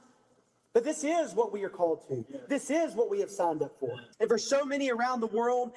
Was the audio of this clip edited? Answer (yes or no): yes